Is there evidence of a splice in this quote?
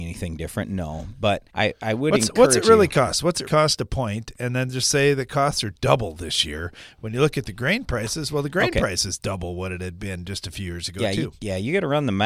yes; 2 cuts; at 1.5 s, 3.4 s

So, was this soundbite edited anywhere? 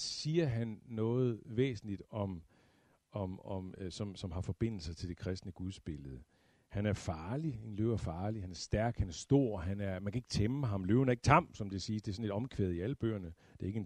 no; 0 cuts

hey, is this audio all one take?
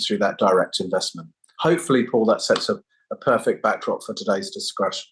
yes; 0 cuts

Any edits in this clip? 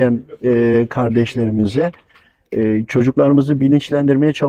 no; 0 cuts

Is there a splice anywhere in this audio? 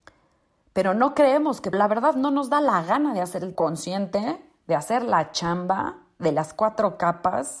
yes; 2 cuts; at 1.7 s, 3.5 s

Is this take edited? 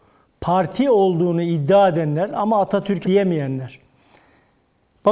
yes; 1 cut; at 3.0 s

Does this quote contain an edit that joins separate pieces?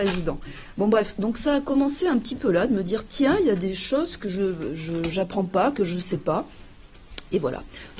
no; 0 cuts

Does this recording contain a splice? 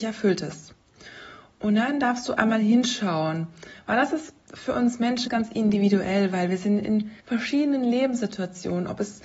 yes; 3 cuts; at 4.4 s, 5.3 s, 7.2 s

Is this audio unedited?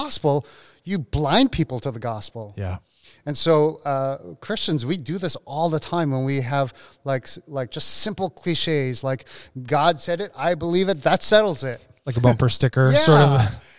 yes; 0 cuts

